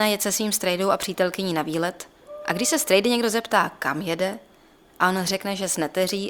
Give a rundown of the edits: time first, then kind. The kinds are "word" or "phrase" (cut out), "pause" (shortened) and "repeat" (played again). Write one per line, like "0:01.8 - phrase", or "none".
none